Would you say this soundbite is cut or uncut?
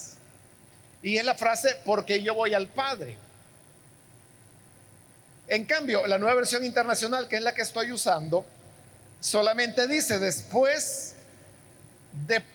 uncut